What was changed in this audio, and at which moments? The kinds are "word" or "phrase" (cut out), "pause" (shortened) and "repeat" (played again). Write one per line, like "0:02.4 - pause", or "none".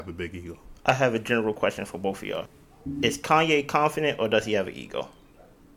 none